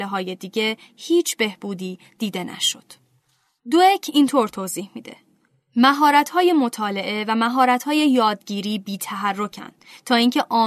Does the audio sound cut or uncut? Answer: uncut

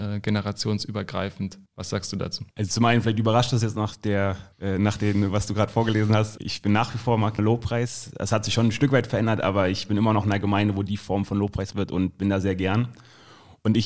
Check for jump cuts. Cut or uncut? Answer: cut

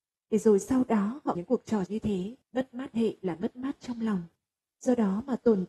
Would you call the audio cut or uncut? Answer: cut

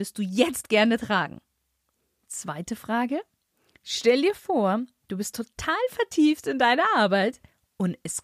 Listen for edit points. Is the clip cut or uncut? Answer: uncut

